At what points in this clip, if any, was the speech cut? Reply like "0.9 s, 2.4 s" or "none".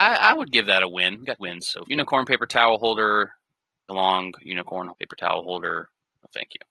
1.4 s, 1.8 s, 3.9 s, 4.9 s

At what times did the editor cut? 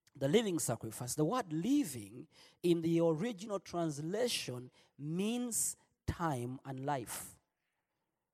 none

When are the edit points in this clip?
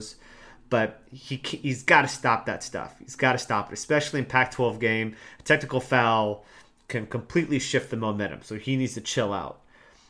none

